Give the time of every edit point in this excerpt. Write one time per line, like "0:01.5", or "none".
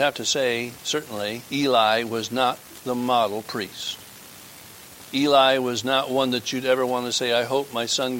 0:01.5
0:05.1